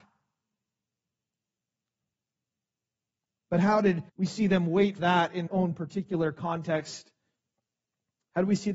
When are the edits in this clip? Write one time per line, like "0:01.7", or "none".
0:04.1
0:05.0
0:05.5